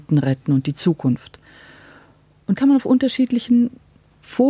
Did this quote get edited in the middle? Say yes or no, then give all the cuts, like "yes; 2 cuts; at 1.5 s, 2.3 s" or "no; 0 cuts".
yes; 1 cut; at 2.6 s